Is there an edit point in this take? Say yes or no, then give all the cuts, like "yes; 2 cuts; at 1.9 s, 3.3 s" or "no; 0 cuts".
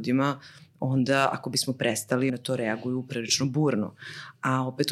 yes; 1 cut; at 2.3 s